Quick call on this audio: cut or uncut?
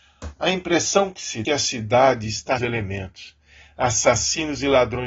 cut